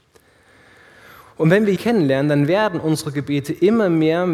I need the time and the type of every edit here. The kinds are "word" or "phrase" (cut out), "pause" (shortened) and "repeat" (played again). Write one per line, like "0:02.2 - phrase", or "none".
0:01.8 - phrase